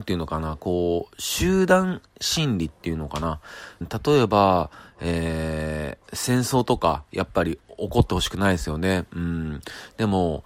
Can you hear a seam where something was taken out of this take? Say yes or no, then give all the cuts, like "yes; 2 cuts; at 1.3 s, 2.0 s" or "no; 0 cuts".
yes; 2 cuts; at 3.8 s, 6.0 s